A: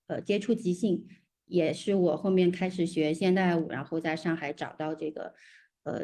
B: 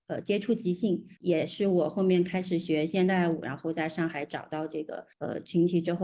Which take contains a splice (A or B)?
B